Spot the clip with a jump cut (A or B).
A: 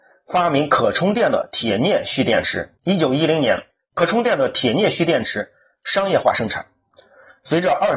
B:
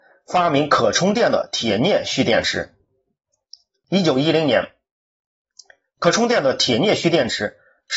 A